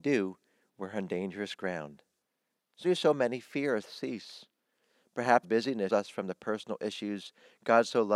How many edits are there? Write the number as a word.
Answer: four